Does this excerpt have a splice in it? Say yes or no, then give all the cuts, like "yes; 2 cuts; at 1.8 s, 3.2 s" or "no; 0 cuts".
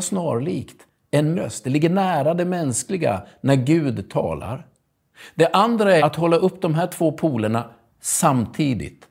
yes; 2 cuts; at 1.3 s, 6.0 s